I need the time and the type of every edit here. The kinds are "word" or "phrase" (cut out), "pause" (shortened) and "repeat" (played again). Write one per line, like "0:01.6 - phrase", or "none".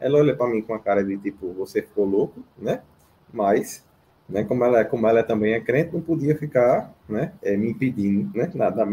0:02.5 - pause
0:04.0 - pause
0:07.4 - pause